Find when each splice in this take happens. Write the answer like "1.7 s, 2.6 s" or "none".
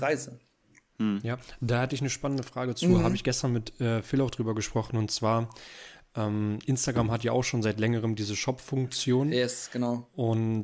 none

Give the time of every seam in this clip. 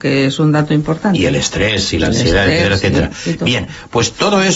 none

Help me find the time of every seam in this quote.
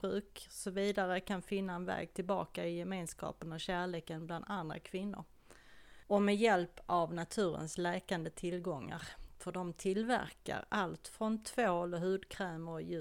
6.0 s

